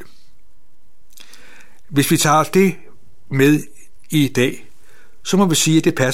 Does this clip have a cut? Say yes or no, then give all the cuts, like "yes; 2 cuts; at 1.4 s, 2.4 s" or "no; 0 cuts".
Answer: no; 0 cuts